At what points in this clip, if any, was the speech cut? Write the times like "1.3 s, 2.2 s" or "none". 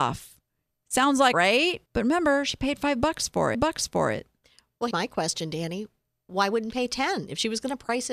1.3 s, 1.9 s, 3.5 s, 4.9 s, 6.7 s